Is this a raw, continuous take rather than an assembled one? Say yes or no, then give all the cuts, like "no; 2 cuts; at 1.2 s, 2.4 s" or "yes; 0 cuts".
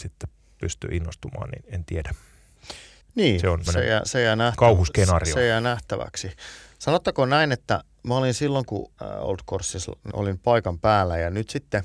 no; 4 cuts; at 3.0 s, 3.7 s, 8.9 s, 10.1 s